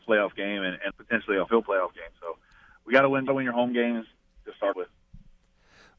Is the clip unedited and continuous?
no; 4 cuts; at 0.9 s, 1.5 s, 3.3 s, 4.7 s

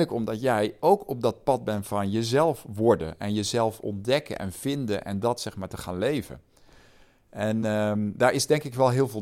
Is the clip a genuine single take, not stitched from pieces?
yes; 0 cuts

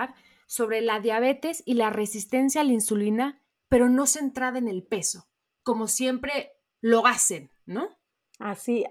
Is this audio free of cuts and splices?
yes; 0 cuts

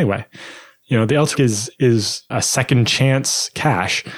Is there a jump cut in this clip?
yes; 2 cuts; at 1.4 s, 2.3 s

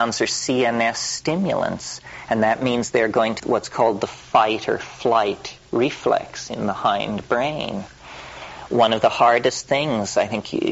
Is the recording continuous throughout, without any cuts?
no; 2 cuts; at 3.4 s, 5.6 s

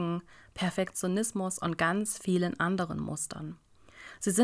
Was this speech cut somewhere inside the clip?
no; 0 cuts

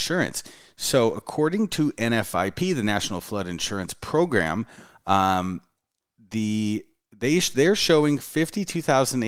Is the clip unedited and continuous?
yes; 0 cuts

